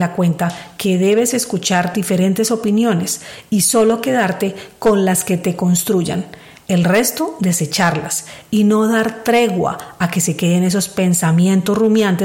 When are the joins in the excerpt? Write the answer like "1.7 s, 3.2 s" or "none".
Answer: none